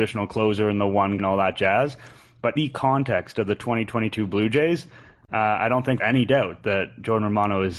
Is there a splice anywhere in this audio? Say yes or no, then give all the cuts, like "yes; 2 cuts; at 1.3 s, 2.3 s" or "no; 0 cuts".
yes; 3 cuts; at 1.2 s, 2.6 s, 6.0 s